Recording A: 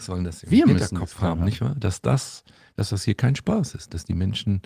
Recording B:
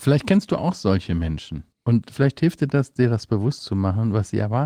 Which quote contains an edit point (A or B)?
B